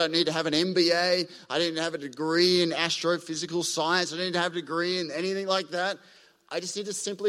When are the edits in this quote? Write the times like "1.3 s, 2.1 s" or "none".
none